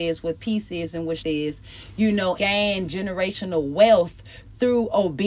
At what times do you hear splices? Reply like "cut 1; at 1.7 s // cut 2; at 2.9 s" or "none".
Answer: cut 1; at 1.2 s // cut 2; at 2.4 s